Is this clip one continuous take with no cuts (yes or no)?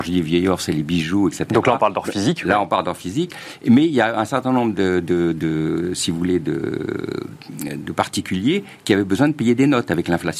yes